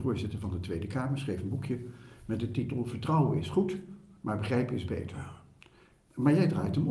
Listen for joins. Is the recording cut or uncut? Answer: uncut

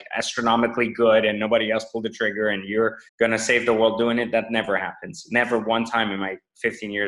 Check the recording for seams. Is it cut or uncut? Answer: cut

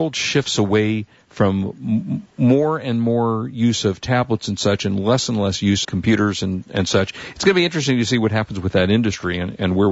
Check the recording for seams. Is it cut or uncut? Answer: cut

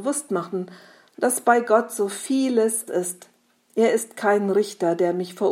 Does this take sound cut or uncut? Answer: cut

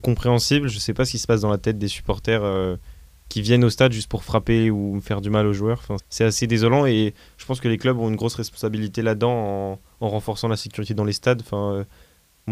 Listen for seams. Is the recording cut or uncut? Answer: cut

